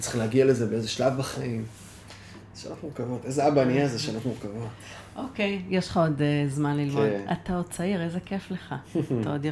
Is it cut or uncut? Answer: uncut